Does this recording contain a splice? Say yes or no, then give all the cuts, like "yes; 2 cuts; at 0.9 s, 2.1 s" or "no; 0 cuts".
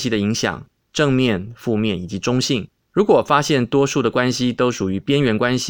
no; 0 cuts